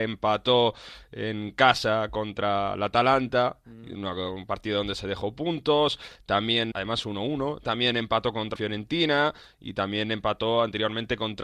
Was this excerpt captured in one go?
no; 2 cuts; at 6.7 s, 8.6 s

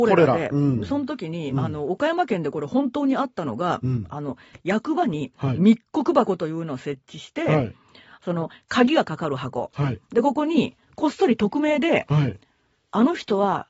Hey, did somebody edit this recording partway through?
no; 0 cuts

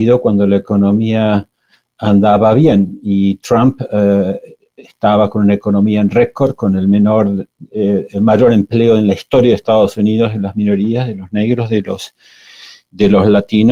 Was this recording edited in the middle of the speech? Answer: no; 0 cuts

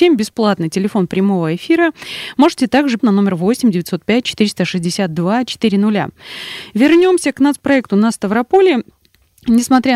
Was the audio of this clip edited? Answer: yes; 1 cut; at 3.0 s

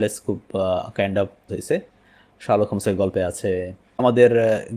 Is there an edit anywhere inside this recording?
yes; 1 cut; at 1.5 s

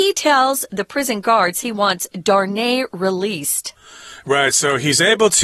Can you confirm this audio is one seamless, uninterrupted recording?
yes; 0 cuts

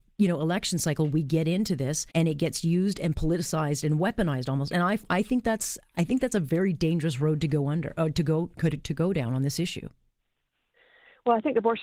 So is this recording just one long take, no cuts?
no; 1 cut; at 2.1 s

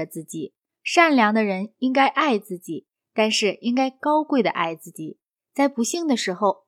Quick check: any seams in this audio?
no; 0 cuts

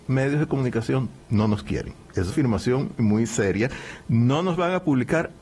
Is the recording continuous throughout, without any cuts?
no; 3 cuts; at 1.2 s, 2.3 s, 3.0 s

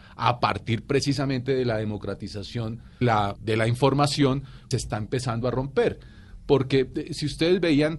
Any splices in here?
yes; 3 cuts; at 3.0 s, 3.4 s, 4.7 s

